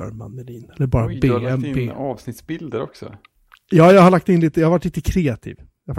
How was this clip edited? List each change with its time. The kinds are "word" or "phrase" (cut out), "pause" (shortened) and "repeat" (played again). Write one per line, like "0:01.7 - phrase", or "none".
none